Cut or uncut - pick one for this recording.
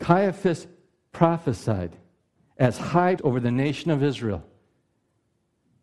cut